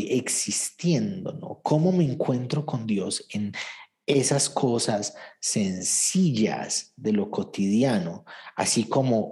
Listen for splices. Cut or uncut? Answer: uncut